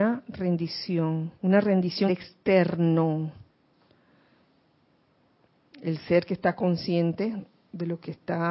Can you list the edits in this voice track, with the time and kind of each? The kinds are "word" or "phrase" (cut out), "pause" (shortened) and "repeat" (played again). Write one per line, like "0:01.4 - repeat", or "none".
0:01.4 - pause
0:02.1 - phrase